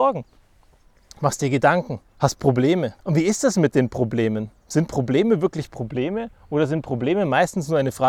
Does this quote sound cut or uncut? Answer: cut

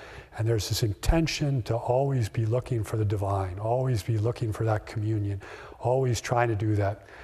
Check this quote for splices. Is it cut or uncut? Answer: uncut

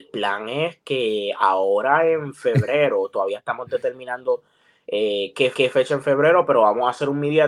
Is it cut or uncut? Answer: cut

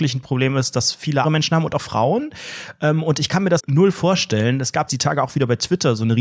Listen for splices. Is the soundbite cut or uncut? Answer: cut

